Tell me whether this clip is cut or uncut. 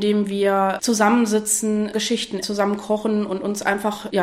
cut